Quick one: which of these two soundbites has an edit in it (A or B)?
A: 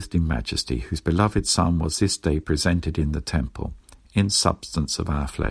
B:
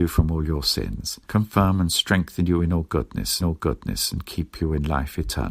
B